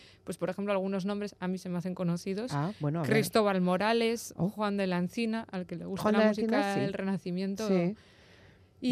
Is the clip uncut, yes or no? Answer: yes